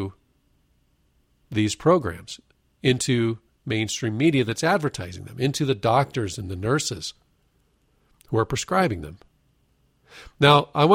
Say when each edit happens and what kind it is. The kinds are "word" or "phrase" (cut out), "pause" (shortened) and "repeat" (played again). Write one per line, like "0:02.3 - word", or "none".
none